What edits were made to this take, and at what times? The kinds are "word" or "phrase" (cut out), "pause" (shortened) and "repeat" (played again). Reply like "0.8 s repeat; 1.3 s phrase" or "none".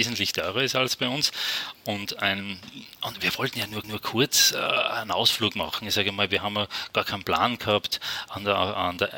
3.8 s repeat